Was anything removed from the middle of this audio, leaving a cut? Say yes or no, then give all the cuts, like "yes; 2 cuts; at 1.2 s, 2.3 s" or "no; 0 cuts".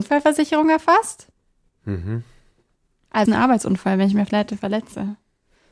yes; 2 cuts; at 3.3 s, 4.3 s